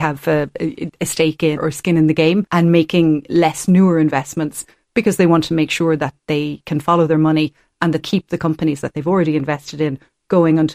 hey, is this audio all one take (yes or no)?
no